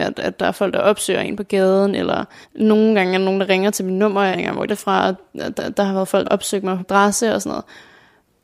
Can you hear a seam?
yes; 6 cuts; at 2.4 s, 4.3 s, 4.7 s, 5.6 s, 6.2 s, 6.8 s

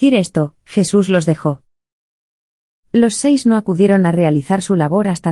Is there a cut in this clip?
no; 0 cuts

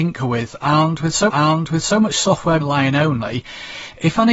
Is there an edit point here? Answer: yes; 2 cuts; at 1.3 s, 2.6 s

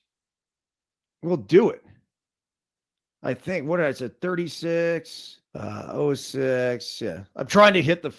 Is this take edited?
yes; 1 cut; at 5.4 s

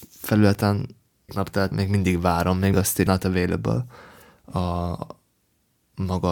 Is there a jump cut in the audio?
yes; 4 cuts; at 1.3 s, 1.7 s, 2.7 s, 3.1 s

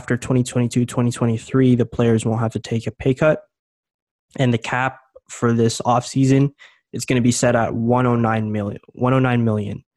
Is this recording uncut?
yes; 0 cuts

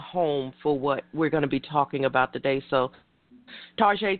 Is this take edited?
no; 0 cuts

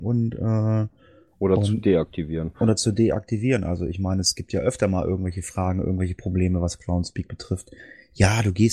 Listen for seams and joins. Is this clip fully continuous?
yes; 0 cuts

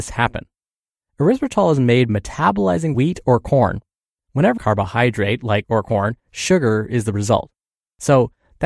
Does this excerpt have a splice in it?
yes; 5 cuts; at 2.1 s, 2.9 s, 4.6 s, 5.6 s, 6.2 s

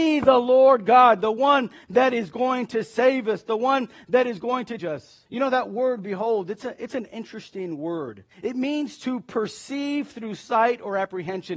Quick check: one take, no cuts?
no; 3 cuts; at 4.8 s, 5.3 s, 8.3 s

